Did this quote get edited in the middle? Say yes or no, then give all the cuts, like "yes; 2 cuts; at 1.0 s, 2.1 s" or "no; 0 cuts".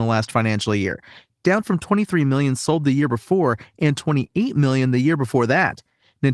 no; 0 cuts